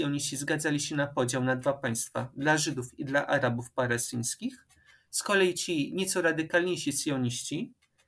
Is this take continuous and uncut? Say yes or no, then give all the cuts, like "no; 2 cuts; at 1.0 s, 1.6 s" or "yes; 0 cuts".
yes; 0 cuts